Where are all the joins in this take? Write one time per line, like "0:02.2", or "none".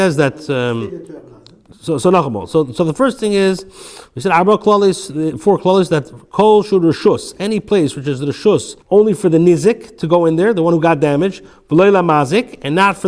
0:08.8

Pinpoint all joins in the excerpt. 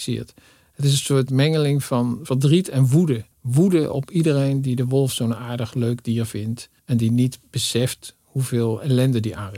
0:03.3
0:06.8

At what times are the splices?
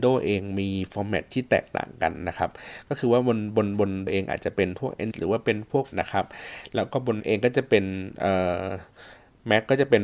0:04.1
0:05.1
0:05.9
0:07.2

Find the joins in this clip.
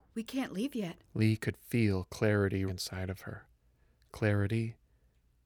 0:02.7

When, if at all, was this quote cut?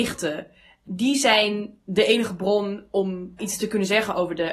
0:03.4

